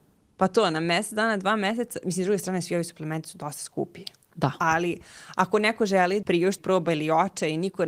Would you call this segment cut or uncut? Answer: cut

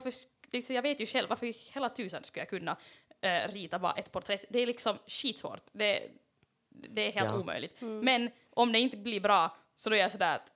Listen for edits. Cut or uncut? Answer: uncut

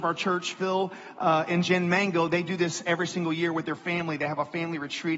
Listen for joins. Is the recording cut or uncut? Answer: uncut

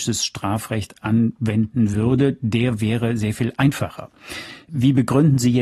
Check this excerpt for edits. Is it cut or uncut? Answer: uncut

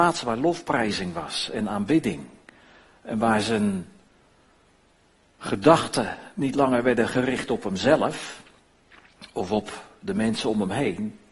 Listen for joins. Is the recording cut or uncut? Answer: uncut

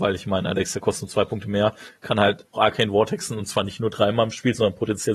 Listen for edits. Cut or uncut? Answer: cut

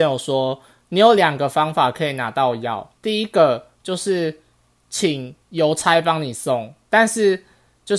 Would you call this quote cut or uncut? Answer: cut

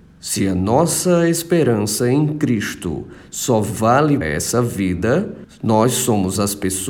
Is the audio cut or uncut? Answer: cut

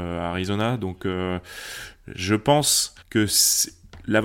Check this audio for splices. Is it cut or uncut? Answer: cut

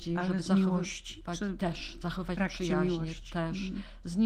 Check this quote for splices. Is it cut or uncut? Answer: uncut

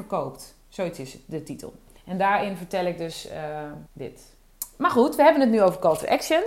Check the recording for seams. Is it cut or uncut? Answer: cut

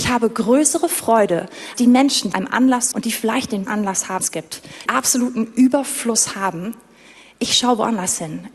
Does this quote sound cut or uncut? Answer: cut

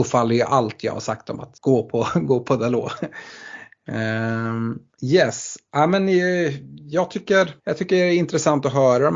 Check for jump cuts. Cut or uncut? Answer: cut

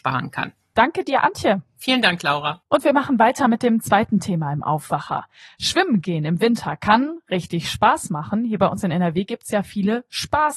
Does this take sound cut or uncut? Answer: uncut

